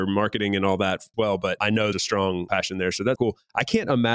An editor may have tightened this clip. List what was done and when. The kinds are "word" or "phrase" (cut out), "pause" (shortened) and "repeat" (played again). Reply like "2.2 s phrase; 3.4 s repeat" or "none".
1.1 s word; 1.9 s phrase; 3.2 s word